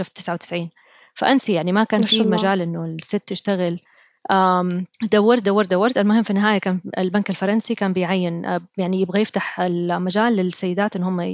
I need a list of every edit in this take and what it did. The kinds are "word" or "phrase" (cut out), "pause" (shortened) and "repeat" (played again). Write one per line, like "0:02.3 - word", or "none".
0:04.9 - pause